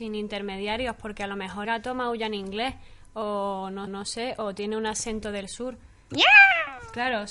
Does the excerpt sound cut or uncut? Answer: cut